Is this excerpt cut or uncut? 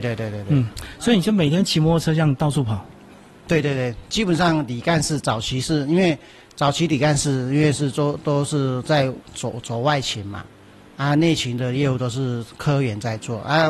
uncut